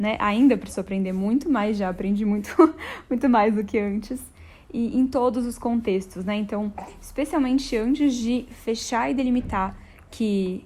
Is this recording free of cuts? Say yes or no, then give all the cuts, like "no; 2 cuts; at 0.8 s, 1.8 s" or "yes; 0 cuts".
yes; 0 cuts